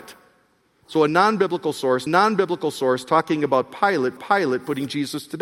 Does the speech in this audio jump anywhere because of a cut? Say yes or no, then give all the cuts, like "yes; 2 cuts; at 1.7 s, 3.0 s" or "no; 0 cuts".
yes; 2 cuts; at 2.1 s, 4.2 s